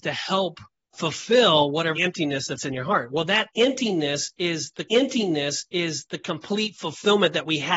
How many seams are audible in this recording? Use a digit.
3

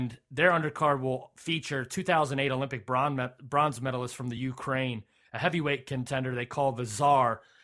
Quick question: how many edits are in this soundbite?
0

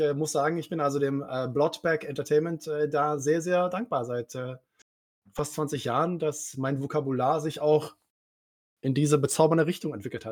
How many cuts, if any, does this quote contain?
0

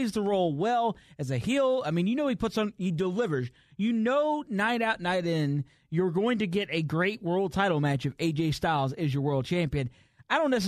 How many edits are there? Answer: 0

